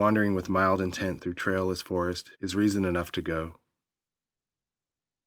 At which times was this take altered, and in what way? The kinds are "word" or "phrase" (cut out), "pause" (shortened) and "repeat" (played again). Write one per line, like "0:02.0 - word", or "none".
0:02.3 - pause